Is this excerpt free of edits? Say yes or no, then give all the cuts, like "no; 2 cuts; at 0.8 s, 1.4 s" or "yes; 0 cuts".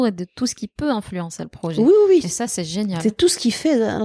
yes; 0 cuts